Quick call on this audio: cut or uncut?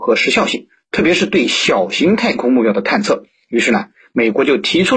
uncut